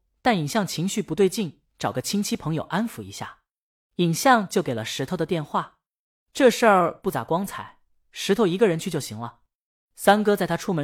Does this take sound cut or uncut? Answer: uncut